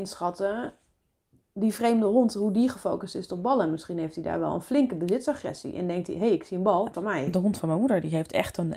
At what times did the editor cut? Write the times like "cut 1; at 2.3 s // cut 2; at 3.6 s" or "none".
cut 1; at 6.9 s